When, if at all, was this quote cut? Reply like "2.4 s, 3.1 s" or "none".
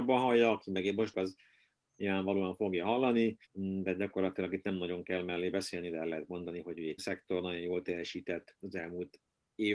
1.1 s, 3.4 s, 7.0 s